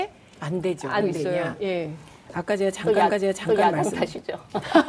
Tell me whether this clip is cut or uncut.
cut